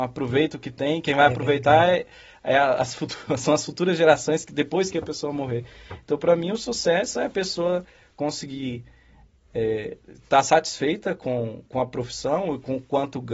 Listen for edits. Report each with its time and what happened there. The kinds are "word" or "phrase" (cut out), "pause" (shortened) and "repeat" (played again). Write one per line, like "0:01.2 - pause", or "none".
none